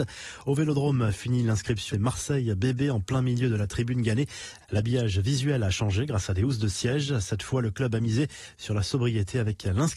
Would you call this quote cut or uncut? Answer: cut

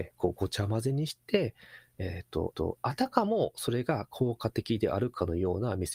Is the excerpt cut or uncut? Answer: cut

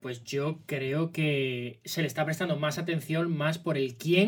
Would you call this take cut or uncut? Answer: uncut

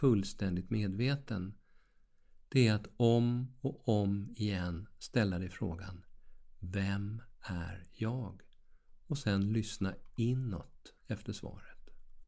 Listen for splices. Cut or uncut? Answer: uncut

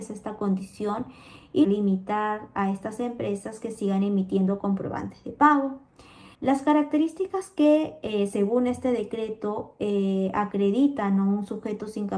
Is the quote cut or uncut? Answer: cut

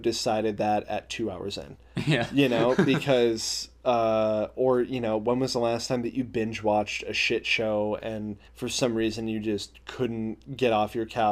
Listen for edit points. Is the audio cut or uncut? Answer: cut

